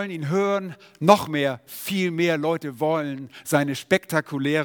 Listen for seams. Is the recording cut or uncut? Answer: uncut